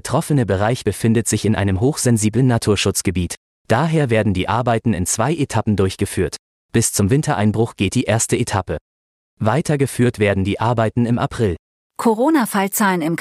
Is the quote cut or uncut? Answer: uncut